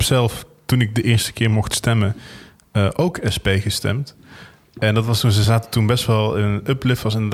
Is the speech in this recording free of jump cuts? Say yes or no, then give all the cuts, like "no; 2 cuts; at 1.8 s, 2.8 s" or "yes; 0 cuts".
yes; 0 cuts